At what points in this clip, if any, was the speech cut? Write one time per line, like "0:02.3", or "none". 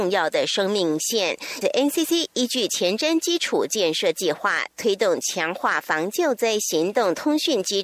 0:01.6